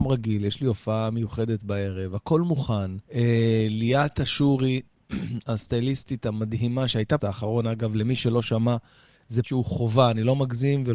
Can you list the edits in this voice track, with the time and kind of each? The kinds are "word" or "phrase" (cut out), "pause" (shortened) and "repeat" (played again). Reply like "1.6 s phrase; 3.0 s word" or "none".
3.0 s pause; 7.2 s phrase; 9.4 s word